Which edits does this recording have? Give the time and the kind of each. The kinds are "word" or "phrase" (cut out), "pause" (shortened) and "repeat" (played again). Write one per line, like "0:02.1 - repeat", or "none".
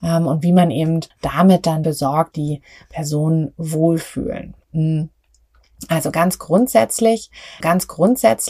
0:01.1 - pause
0:01.8 - word
0:02.3 - phrase
0:04.6 - pause
0:07.6 - repeat